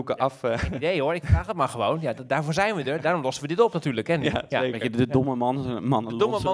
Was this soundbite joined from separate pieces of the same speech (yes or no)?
no